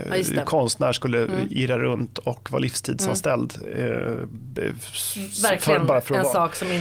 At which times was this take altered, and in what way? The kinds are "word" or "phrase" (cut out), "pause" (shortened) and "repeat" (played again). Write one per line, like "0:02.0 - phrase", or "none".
none